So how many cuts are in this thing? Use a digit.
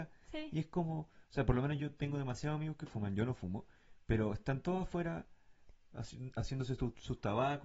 0